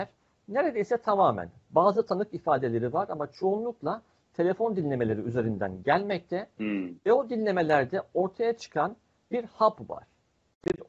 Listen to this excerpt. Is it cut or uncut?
uncut